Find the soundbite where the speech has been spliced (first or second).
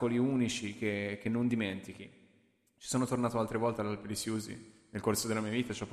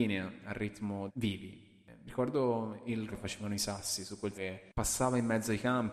second